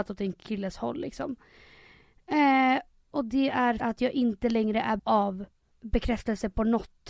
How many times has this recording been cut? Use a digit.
2